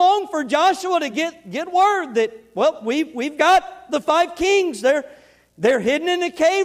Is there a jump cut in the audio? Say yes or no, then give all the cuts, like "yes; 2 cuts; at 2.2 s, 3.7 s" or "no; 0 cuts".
no; 0 cuts